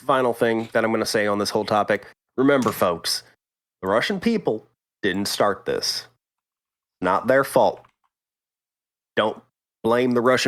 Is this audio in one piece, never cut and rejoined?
yes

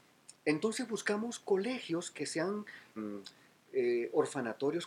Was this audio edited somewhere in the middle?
yes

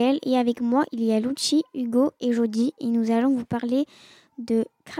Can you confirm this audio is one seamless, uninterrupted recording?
yes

